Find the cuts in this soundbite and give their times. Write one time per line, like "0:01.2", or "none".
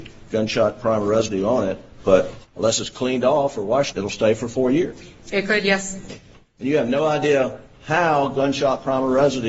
0:02.5
0:03.9

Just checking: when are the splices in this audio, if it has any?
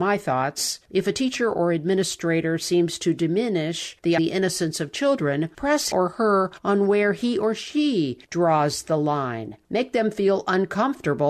0:04.2
0:05.5
0:05.9

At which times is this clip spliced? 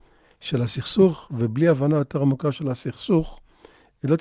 none

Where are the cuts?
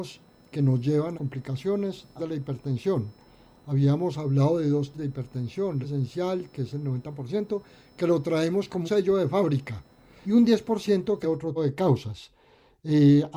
0:01.1
0:02.2
0:04.9
0:05.8
0:08.8
0:10.2
0:11.2
0:11.6

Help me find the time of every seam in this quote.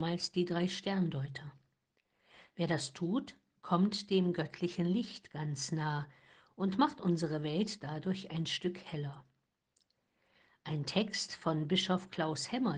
none

